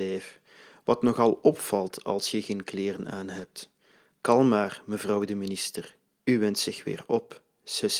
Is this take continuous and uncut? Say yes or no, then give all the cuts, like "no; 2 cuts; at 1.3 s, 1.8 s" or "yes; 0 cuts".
yes; 0 cuts